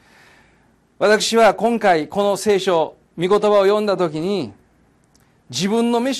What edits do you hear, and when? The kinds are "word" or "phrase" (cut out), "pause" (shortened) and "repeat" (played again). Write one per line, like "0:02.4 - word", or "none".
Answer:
none